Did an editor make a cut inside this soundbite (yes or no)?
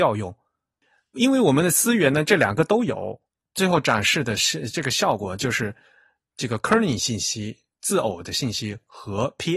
no